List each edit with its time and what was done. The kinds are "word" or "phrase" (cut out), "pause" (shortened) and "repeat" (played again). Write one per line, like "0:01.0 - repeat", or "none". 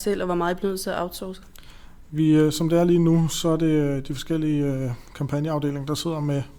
none